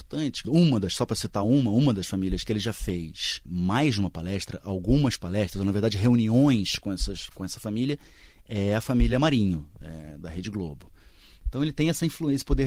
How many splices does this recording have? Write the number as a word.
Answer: zero